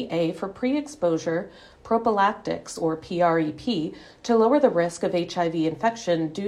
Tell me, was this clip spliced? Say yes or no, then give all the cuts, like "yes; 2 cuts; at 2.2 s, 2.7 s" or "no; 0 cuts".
no; 0 cuts